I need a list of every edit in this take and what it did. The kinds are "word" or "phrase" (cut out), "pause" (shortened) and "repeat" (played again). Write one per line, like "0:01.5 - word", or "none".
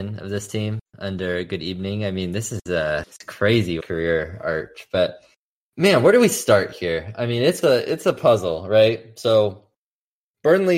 0:03.0 - word
0:03.8 - phrase
0:05.4 - pause
0:07.6 - phrase